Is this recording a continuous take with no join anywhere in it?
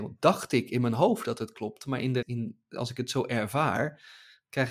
no; 1 cut; at 2.2 s

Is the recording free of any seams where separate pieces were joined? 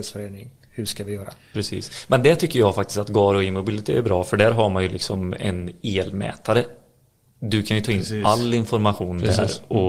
yes; 0 cuts

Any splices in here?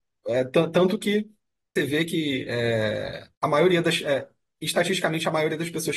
yes; 2 cuts; at 1.8 s, 3.3 s

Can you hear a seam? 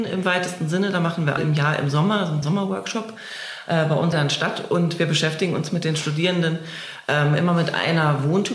yes; 3 cuts; at 1.4 s, 2.4 s, 4.1 s

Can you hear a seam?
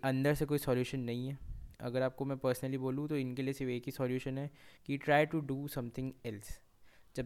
yes; 1 cut; at 4.8 s

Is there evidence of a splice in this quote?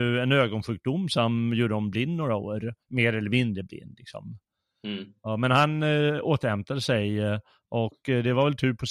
yes; 1 cut; at 2.8 s

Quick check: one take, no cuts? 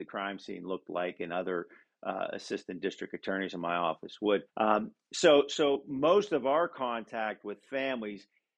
no; 1 cut; at 4.5 s

